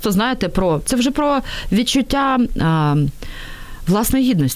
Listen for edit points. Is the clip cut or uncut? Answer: uncut